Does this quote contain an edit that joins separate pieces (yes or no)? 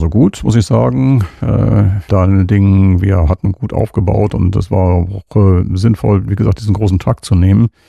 yes